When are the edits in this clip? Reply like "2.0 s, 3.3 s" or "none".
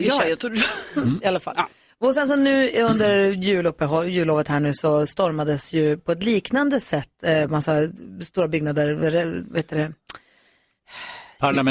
none